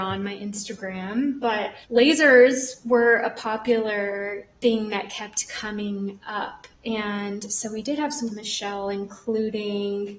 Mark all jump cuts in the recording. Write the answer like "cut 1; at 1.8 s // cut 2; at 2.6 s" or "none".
cut 1; at 1.8 s // cut 2; at 6.7 s // cut 3; at 8.3 s